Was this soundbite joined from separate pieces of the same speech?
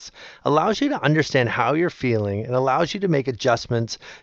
no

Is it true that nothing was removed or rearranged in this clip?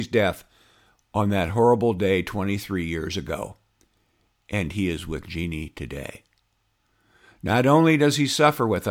yes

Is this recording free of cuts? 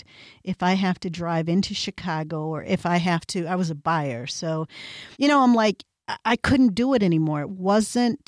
no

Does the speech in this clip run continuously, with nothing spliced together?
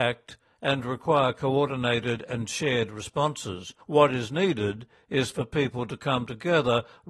no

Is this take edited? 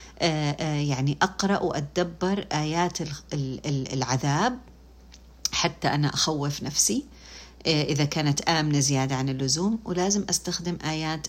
no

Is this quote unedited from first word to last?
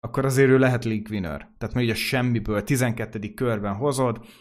yes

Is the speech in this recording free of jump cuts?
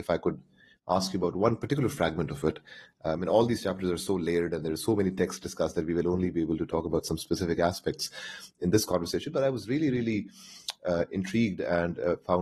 yes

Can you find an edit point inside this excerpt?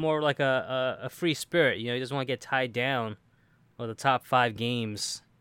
no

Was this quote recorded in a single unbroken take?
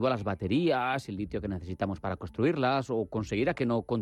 yes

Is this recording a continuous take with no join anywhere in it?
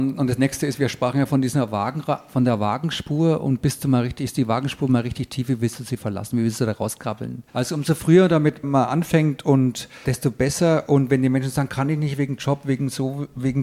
no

